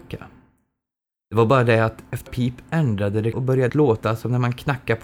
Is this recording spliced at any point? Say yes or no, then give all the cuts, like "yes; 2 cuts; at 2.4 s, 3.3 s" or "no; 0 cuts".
yes; 3 cuts; at 2.3 s, 3.3 s, 3.7 s